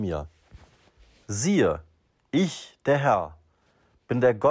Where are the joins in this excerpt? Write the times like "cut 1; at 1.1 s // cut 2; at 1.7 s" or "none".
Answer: none